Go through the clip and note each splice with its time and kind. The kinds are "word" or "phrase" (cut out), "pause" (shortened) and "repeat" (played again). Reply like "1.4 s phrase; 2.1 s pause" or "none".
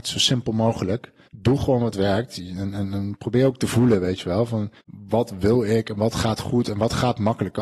1.2 s pause; 4.8 s pause